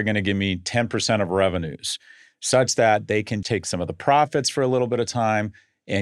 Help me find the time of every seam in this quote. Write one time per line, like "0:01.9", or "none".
0:03.4